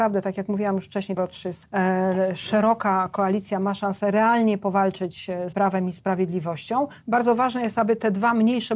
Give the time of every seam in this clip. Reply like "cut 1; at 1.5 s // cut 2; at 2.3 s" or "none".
cut 1; at 1.2 s // cut 2; at 1.6 s // cut 3; at 5.5 s